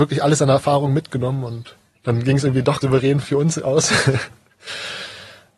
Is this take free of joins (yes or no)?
no